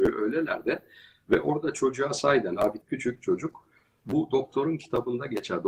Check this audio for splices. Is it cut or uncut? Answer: cut